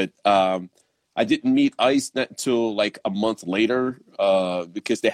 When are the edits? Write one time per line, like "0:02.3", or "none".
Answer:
none